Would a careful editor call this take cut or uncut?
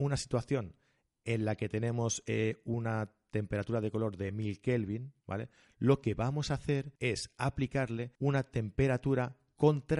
cut